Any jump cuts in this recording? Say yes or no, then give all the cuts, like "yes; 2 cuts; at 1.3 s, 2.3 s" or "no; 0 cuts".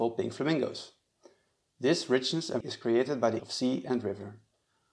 yes; 2 cuts; at 2.6 s, 3.4 s